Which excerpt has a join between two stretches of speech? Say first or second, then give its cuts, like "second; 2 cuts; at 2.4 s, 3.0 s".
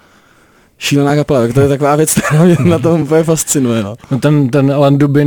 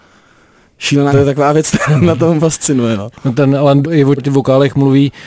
second; 6 cuts; at 1.1 s, 1.9 s, 2.4 s, 3.3 s, 3.8 s, 4.2 s